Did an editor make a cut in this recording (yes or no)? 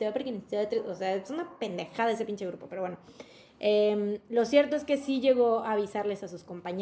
no